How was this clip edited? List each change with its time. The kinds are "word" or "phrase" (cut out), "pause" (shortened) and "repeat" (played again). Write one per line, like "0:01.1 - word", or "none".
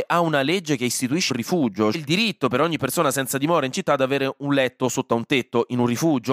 0:01.3 - phrase
0:01.9 - word